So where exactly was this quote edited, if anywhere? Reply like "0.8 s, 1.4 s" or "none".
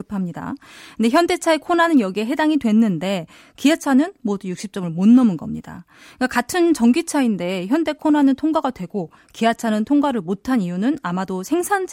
none